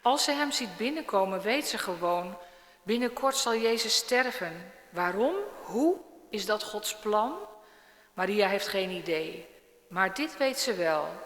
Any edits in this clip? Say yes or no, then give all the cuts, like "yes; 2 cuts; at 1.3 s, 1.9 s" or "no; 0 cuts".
no; 0 cuts